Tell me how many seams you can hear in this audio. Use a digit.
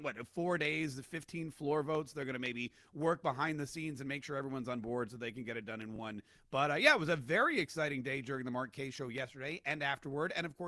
0